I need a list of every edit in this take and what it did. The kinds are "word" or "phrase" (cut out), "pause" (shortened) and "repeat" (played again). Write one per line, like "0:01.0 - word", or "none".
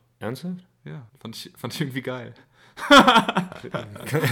0:01.1 - pause